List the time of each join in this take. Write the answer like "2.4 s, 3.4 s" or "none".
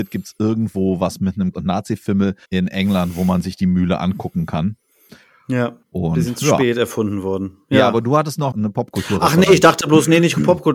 1.5 s, 2.4 s, 5.8 s, 8.5 s